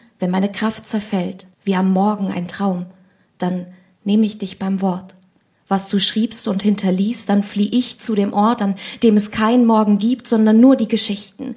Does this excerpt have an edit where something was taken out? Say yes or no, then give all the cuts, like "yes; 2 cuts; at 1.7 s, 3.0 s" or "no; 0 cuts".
yes; 1 cut; at 1.5 s